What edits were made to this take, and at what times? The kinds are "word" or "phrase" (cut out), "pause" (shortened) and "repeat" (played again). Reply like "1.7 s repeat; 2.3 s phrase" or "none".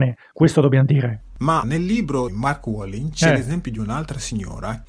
1.6 s word; 2.3 s word